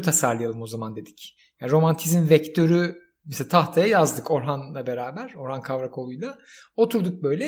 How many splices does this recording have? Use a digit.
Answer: 0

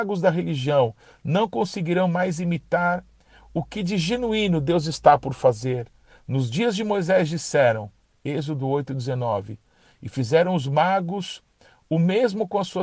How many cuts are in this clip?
0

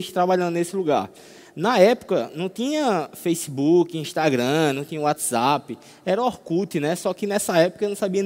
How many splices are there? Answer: 0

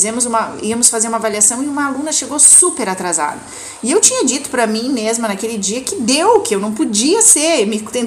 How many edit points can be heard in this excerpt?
0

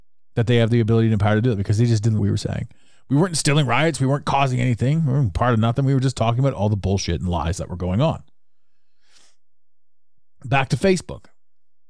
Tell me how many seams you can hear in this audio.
1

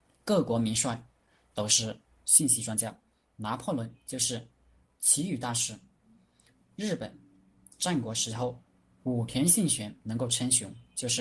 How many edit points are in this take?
1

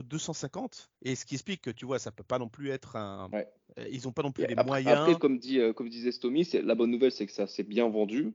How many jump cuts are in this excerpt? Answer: 1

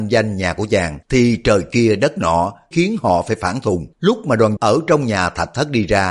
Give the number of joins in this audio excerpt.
4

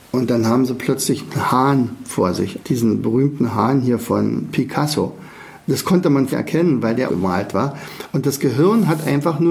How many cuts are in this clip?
3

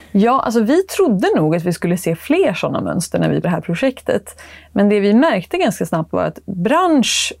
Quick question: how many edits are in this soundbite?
1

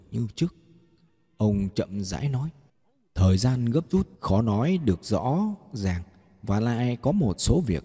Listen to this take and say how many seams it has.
2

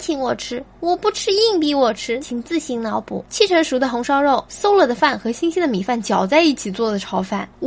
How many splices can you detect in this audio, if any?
1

